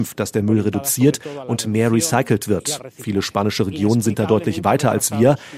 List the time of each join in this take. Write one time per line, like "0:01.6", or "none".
none